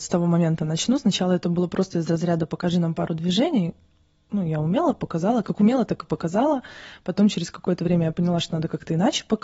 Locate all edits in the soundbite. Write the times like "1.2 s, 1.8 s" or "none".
none